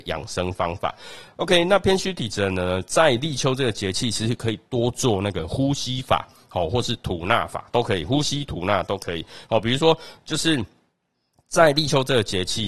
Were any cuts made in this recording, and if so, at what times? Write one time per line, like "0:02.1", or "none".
none